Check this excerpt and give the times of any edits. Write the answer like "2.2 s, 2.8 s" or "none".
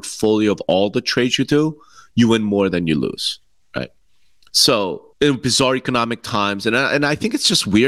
5.1 s